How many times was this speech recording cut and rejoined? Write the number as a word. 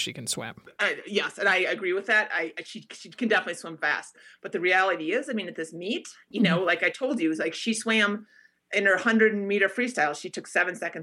zero